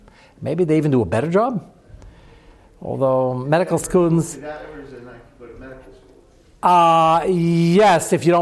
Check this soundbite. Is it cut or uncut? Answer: uncut